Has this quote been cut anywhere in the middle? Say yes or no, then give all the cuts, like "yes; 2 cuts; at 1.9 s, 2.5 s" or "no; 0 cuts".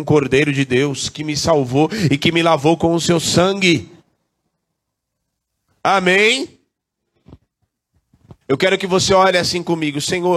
yes; 1 cut; at 8.4 s